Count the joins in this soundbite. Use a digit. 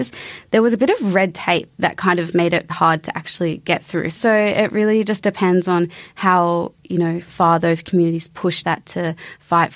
2